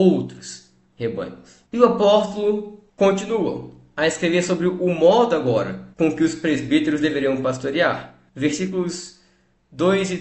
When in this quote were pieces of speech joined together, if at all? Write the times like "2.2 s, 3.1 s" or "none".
1.7 s, 2.9 s, 5.9 s, 8.3 s